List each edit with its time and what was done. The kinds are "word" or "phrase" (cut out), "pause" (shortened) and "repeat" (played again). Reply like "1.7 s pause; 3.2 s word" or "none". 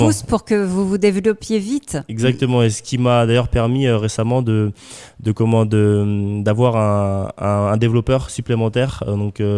none

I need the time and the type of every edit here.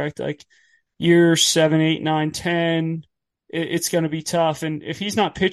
none

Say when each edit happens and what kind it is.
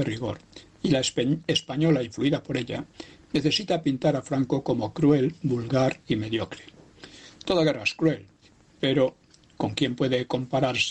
none

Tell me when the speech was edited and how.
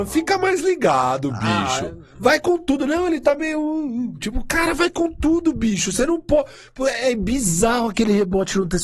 none

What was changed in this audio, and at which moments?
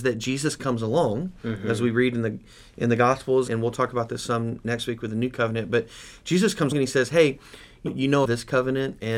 3.5 s word; 6.7 s word; 7.9 s phrase; 8.2 s word

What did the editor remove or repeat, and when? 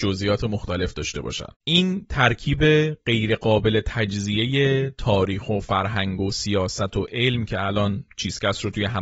1.5 s pause

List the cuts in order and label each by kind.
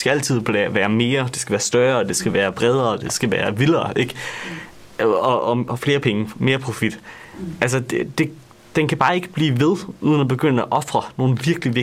none

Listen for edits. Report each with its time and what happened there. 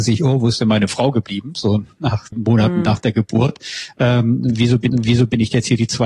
2.3 s word; 4.9 s repeat

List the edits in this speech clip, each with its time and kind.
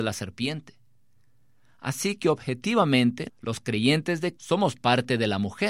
3.3 s word; 4.4 s word

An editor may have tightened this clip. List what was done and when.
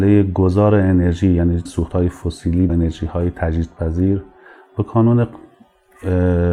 1.7 s word; 2.7 s word

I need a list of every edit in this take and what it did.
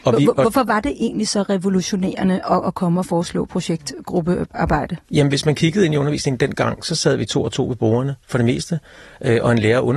5.0 s pause

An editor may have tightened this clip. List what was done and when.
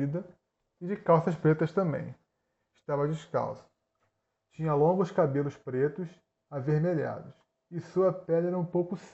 none

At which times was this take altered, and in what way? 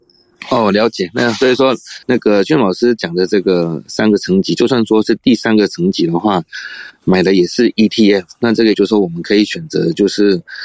2.0 s pause; 8.7 s word

